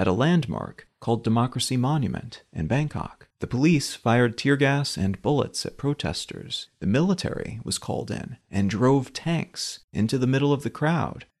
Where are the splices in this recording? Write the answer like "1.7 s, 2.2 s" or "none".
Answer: 3.3 s